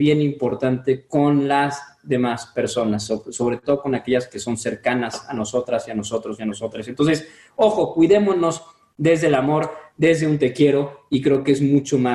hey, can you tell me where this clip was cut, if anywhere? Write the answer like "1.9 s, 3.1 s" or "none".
none